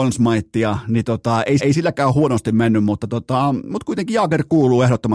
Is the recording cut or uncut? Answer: cut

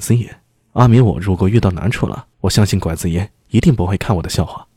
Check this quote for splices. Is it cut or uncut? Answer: cut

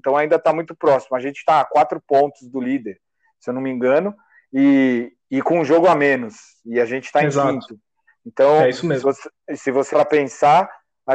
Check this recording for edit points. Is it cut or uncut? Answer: cut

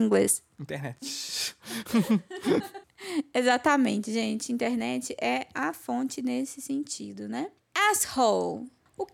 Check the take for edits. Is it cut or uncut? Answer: uncut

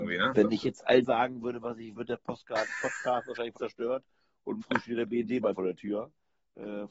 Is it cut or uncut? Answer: cut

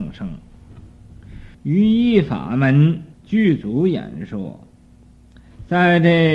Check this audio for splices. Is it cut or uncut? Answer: cut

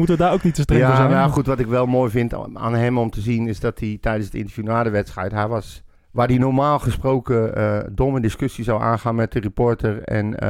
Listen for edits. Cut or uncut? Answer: cut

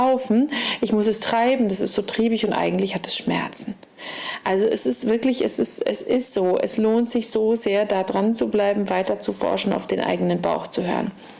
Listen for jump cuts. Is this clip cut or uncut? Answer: uncut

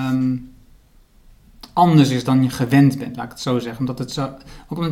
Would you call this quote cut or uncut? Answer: uncut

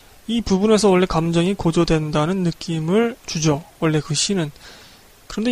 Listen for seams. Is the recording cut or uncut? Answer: cut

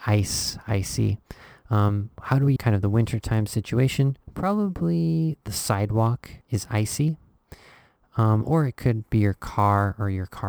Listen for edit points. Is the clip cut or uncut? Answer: cut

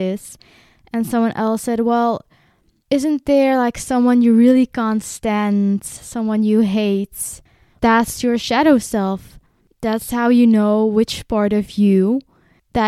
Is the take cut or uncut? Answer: uncut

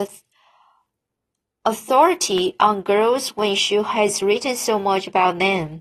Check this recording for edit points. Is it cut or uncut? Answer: uncut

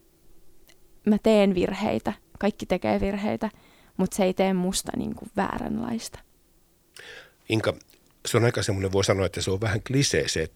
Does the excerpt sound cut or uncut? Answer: uncut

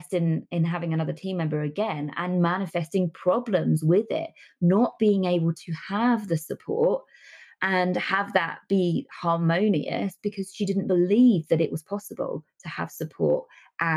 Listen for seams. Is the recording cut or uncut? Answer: uncut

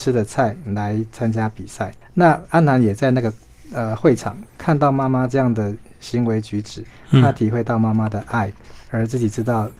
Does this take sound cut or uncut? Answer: uncut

